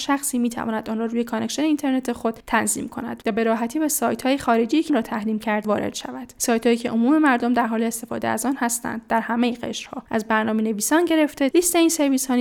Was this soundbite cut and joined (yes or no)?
yes